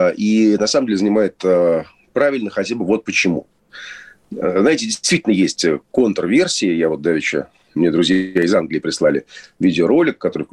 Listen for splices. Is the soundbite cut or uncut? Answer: uncut